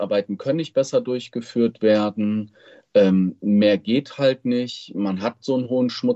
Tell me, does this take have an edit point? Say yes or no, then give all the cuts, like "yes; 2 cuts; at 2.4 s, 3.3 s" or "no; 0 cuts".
no; 0 cuts